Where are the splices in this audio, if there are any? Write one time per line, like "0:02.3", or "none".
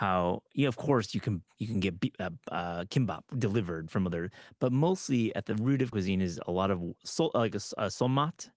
0:03.3
0:05.9

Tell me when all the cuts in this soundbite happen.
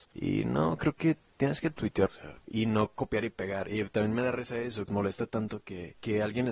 0:02.1
0:04.9

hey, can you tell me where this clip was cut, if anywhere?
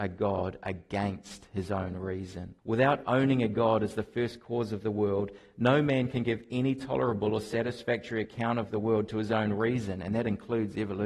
0:02.6

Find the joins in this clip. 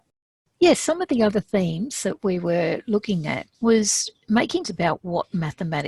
0:03.5
0:04.6

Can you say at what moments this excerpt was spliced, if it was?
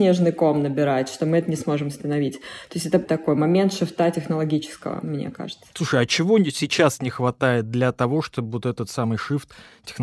0:03.0

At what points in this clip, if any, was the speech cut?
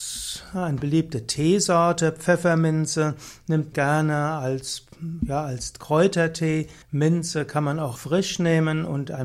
0:03.7
0:06.8
0:08.0

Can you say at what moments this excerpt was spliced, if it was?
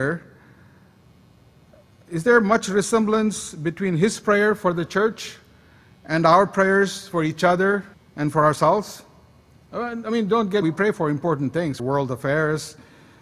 0:07.9
0:10.6
0:11.8

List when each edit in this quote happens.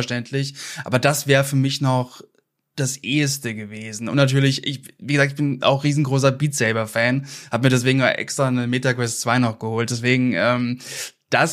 none

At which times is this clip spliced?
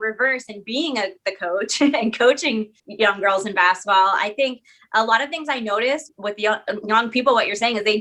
0:02.8
0:06.1

